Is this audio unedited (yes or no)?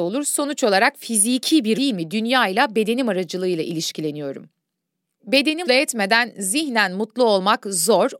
no